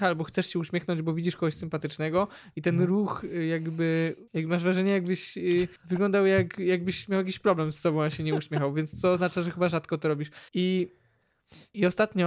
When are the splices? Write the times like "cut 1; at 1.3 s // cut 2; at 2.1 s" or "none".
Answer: cut 1; at 4.3 s // cut 2; at 5.8 s // cut 3; at 10.5 s